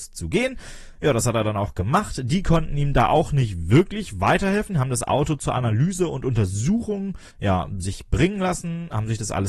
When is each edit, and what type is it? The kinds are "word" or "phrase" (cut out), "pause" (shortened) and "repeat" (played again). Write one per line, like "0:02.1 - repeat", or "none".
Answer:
0:07.3 - pause